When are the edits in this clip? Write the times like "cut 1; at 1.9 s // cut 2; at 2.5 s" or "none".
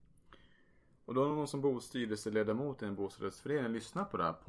none